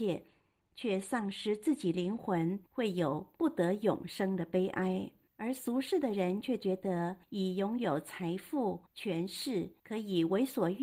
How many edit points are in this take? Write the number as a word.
five